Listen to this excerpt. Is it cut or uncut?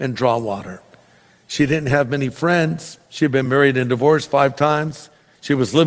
uncut